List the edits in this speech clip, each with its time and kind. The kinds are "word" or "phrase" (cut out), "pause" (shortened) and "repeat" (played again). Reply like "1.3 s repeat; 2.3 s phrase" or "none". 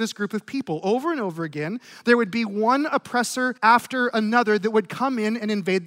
3.6 s pause